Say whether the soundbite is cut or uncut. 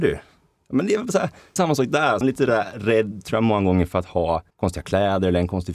cut